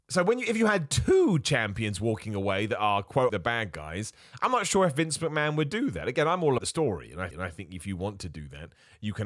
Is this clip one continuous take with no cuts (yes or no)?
no